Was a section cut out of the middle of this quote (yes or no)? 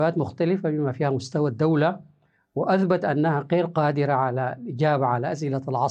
no